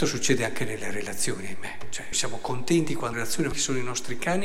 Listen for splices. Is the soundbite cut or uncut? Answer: cut